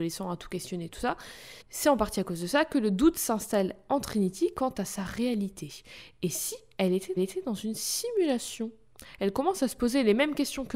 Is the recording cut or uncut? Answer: cut